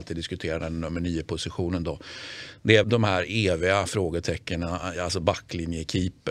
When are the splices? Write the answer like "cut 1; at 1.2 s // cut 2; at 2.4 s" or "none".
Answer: cut 1; at 2.8 s // cut 2; at 5.0 s